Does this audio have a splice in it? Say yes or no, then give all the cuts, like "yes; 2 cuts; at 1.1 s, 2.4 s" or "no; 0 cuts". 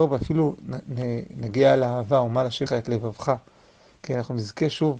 yes; 1 cut; at 2.7 s